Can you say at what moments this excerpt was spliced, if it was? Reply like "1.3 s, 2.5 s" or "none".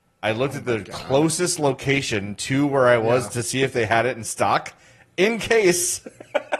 none